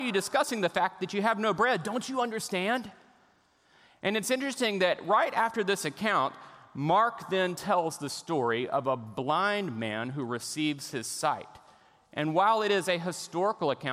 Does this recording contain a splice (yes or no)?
no